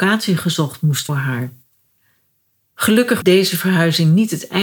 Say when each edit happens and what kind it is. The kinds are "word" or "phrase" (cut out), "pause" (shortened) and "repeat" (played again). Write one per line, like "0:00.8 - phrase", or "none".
0:01.1 - phrase
0:03.2 - word